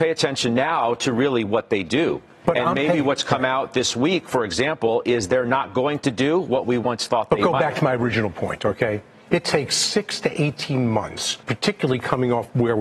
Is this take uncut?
no; 1 cut; at 11.4 s

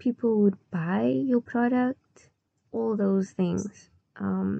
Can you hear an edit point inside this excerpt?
yes; 1 cut; at 2.5 s

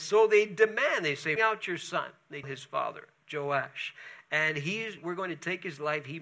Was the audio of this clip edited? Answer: yes; 3 cuts; at 1.4 s, 2.4 s, 5.0 s

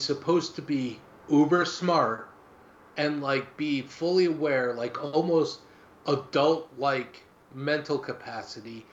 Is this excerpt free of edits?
yes; 0 cuts

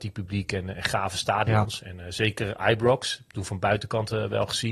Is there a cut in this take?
no; 0 cuts

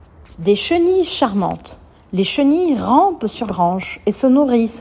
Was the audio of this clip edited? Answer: yes; 2 cuts; at 1.9 s, 3.5 s

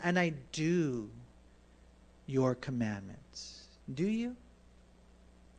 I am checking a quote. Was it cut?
no; 0 cuts

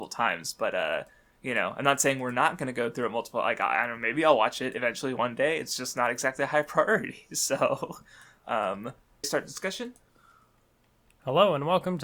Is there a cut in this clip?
yes; 1 cut; at 9.2 s

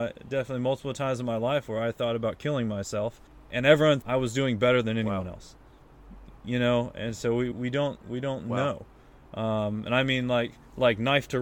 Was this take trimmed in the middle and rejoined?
yes; 2 cuts; at 4.0 s, 7.5 s

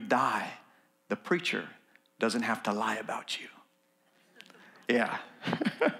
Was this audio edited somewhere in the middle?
no; 0 cuts

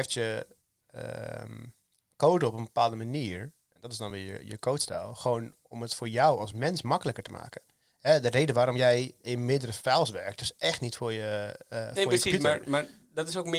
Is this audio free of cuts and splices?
yes; 0 cuts

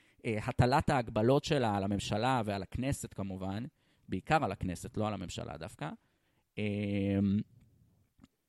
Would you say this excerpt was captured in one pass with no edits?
yes; 0 cuts

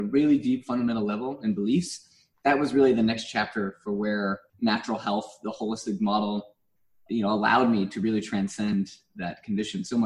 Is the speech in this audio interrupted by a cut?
yes; 2 cuts; at 4.5 s, 7.1 s

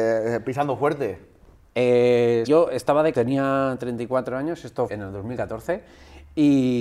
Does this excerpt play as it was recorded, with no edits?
no; 3 cuts; at 2.5 s, 3.1 s, 4.9 s

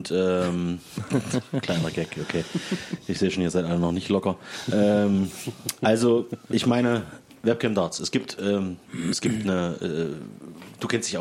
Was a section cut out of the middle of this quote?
no; 0 cuts

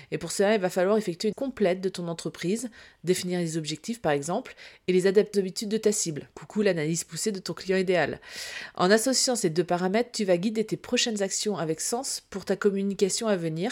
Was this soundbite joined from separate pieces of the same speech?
yes; 3 cuts; at 1.3 s, 5.3 s, 6.3 s

